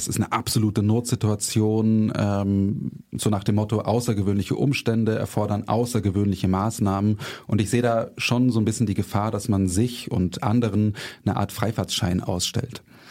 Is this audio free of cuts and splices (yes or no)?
yes